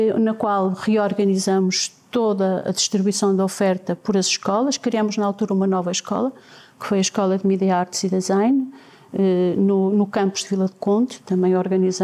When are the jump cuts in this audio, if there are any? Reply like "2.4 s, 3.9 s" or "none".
none